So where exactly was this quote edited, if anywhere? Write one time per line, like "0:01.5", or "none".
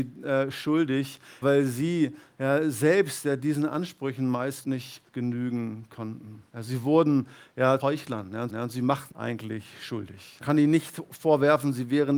0:01.4
0:04.6
0:05.1
0:06.5
0:07.8
0:08.5
0:09.1
0:10.4